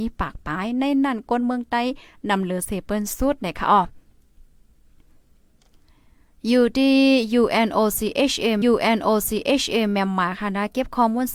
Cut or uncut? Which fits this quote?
cut